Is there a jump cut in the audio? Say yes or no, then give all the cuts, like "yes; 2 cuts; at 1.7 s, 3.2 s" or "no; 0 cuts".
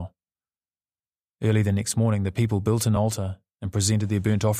no; 0 cuts